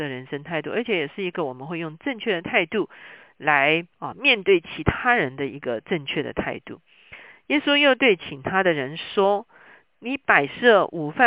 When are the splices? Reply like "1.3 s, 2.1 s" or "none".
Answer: 3.9 s